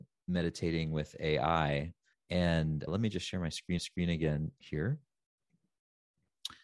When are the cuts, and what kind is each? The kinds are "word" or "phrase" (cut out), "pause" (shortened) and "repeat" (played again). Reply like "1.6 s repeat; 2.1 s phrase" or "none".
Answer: 2.1 s pause; 3.8 s repeat